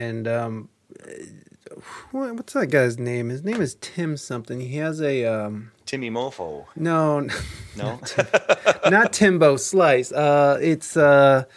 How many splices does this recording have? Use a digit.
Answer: 2